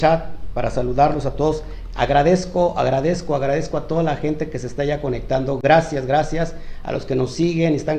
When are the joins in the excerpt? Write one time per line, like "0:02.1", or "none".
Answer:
none